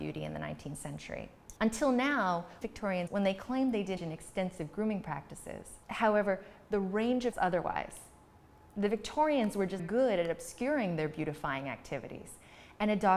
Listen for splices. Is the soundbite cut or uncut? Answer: cut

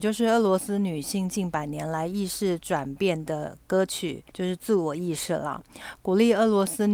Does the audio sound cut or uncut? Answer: cut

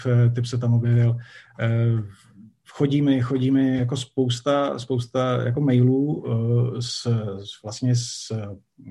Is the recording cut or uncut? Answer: uncut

